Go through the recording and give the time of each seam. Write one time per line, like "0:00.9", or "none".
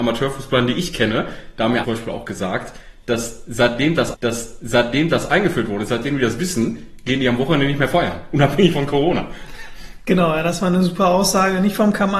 0:01.8
0:04.1

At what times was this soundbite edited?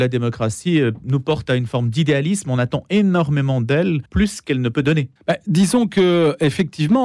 0:04.1
0:05.2

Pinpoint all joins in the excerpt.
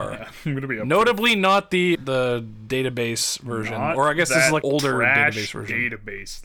0:01.9
0:04.6

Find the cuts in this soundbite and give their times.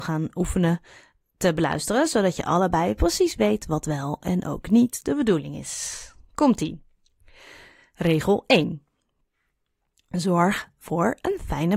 none

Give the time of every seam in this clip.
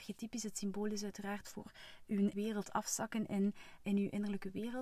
0:02.3
0:03.8

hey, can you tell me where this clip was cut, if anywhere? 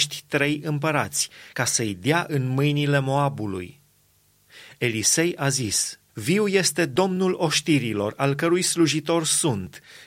0:06.1

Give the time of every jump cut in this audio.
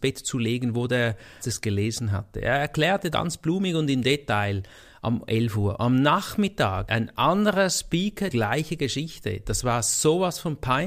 0:01.4
0:03.1
0:06.8
0:08.3

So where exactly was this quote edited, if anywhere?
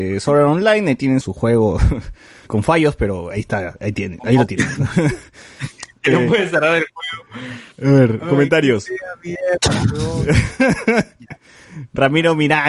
0:01.2
0:02.5
0:07.7

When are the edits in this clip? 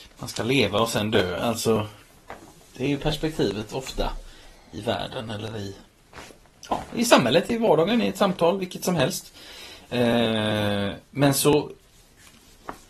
none

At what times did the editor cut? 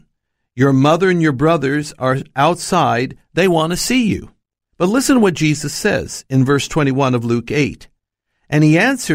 none

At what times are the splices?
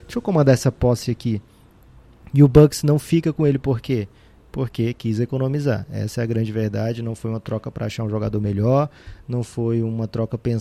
none

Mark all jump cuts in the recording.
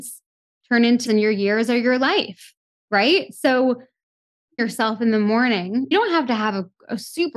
0:01.1
0:04.6
0:05.9

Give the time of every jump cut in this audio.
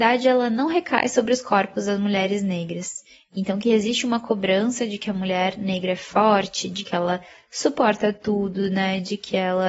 none

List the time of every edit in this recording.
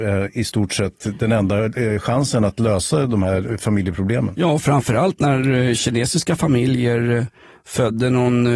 none

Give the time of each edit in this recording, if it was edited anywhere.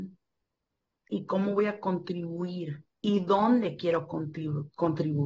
none

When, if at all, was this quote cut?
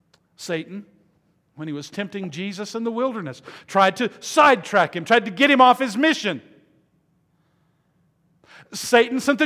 none

